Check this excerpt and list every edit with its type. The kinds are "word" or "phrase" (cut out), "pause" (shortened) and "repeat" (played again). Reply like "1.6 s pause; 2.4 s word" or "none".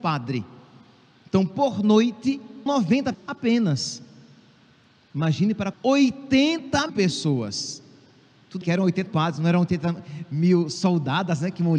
2.7 s word; 3.1 s word; 5.7 s word; 6.9 s word; 8.6 s word; 9.1 s word